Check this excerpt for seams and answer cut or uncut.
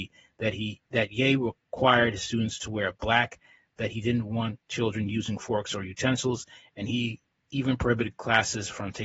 uncut